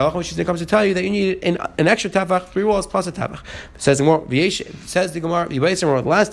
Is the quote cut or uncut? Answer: uncut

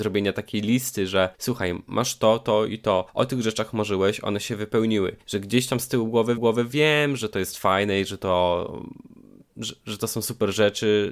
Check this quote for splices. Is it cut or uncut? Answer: cut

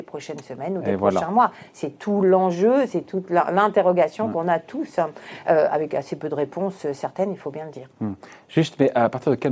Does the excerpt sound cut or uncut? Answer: uncut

